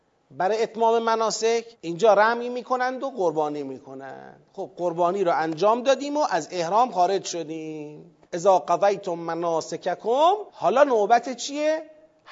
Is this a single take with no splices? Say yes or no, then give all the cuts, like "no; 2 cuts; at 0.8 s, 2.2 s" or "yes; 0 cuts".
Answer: no; 3 cuts; at 1.7 s, 8.2 s, 10.5 s